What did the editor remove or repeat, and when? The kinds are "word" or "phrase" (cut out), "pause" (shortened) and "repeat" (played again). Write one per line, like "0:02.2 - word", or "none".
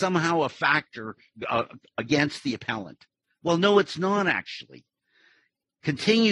none